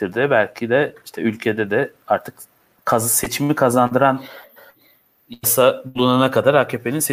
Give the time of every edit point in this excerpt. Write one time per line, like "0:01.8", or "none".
none

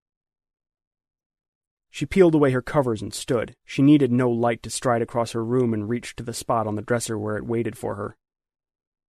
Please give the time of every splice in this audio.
0:03.6

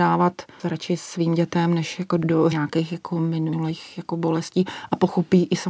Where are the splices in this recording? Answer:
0:02.5

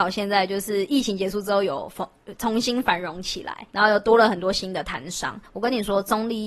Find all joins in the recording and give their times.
0:03.7
0:05.5

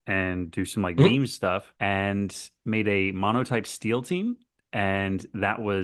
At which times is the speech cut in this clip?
0:01.8

